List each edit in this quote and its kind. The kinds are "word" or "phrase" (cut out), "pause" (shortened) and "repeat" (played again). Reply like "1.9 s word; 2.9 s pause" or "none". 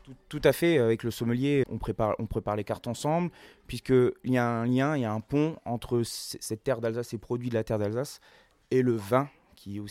1.6 s word